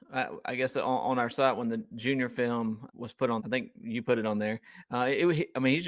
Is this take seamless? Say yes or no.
no